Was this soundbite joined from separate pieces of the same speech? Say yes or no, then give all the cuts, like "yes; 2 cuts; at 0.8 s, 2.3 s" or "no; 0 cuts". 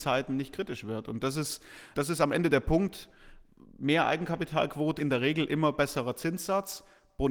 yes; 2 cuts; at 1.9 s, 5.0 s